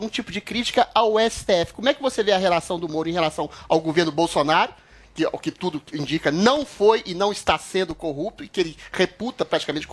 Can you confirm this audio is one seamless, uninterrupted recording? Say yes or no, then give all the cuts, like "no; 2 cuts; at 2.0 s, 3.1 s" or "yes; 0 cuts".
yes; 0 cuts